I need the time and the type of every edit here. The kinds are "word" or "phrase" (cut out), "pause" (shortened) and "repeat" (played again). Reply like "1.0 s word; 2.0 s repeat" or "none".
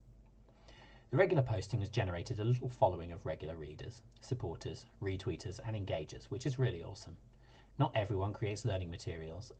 4.1 s pause

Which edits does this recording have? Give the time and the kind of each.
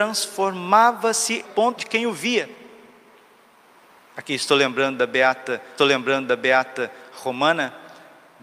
1.4 s phrase; 1.8 s phrase; 5.8 s repeat

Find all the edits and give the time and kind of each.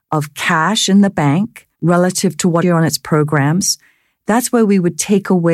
1.7 s pause; 2.6 s phrase

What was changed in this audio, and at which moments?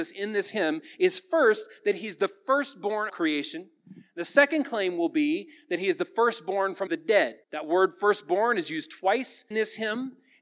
3.1 s phrase; 6.9 s word; 7.4 s pause; 9.5 s word

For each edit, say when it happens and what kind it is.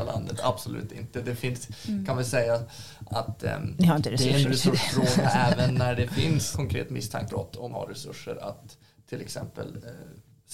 3.1 s word; 6.5 s word; 7.3 s word; 7.7 s word

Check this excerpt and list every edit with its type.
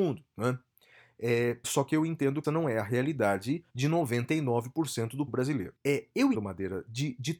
1.6 s word; 2.4 s word; 3.7 s pause; 5.3 s word; 5.8 s pause; 6.3 s word

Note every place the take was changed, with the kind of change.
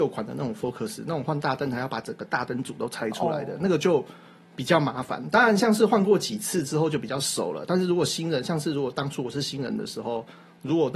none

